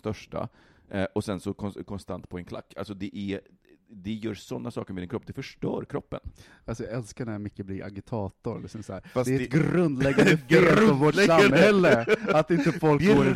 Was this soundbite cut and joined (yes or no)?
no